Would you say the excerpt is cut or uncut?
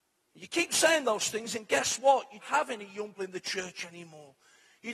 cut